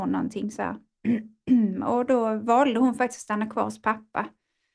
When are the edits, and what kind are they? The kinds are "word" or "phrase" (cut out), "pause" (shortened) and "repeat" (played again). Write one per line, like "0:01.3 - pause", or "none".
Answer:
none